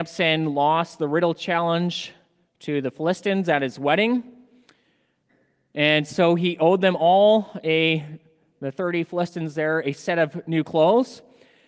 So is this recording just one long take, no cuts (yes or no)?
yes